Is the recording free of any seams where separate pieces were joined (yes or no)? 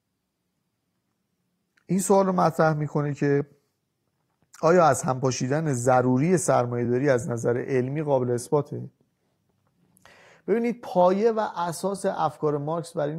yes